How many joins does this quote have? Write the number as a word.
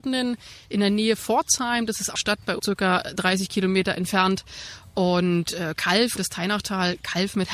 four